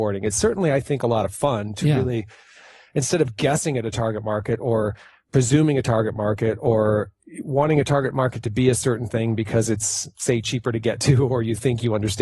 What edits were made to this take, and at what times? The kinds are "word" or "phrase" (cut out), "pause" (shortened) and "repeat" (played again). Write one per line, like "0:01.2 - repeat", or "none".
none